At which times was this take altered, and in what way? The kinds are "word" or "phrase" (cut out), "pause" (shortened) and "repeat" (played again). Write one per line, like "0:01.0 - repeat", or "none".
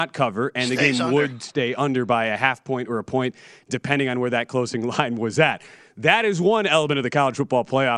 none